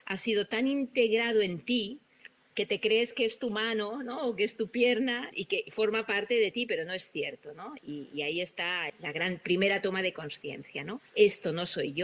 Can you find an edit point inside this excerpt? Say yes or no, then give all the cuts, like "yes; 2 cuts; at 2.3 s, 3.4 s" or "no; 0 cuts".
yes; 2 cuts; at 5.3 s, 11.1 s